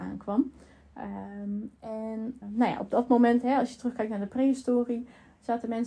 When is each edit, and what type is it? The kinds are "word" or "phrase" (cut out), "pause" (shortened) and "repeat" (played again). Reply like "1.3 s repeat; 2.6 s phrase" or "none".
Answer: 2.4 s word